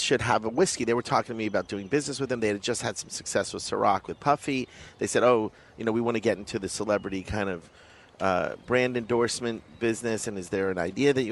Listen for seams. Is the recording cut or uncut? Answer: uncut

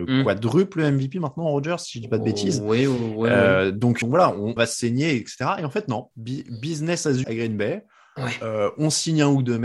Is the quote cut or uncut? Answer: cut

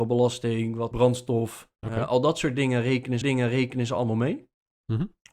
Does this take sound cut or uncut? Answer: cut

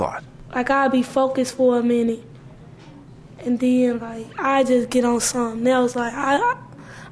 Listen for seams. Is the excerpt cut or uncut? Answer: uncut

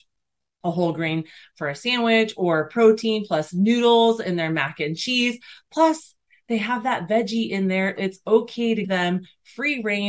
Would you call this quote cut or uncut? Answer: cut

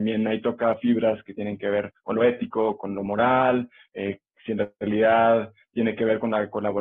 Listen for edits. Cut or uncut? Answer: uncut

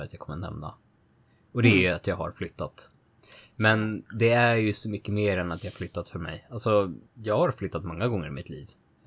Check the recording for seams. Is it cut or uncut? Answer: cut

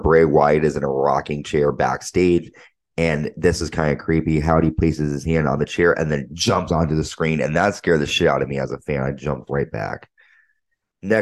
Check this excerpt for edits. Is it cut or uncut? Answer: uncut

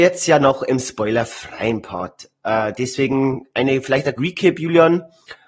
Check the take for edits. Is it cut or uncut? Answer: cut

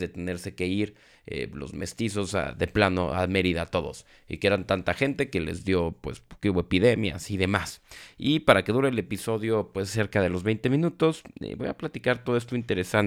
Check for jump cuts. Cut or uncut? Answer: uncut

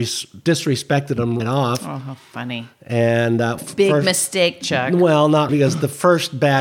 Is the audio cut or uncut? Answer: cut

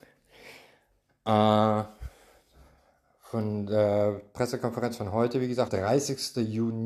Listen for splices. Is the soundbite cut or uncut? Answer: cut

